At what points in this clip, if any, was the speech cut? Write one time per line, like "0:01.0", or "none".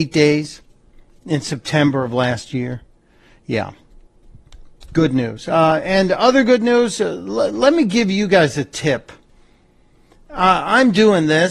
none